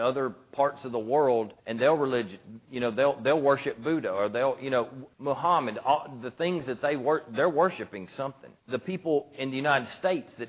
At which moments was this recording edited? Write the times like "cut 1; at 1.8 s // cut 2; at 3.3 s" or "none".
cut 1; at 1.6 s // cut 2; at 5.1 s // cut 3; at 8.6 s